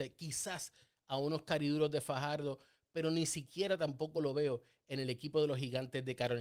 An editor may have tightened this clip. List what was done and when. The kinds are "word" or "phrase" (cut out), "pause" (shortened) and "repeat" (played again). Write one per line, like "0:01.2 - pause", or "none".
none